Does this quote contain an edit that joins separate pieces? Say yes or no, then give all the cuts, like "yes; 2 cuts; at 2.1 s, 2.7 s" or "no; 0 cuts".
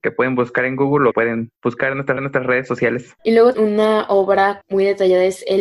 yes; 6 cuts; at 1.1 s, 1.6 s, 2.2 s, 3.2 s, 3.5 s, 4.6 s